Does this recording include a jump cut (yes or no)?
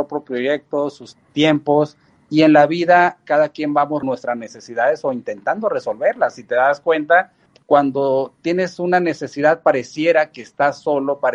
yes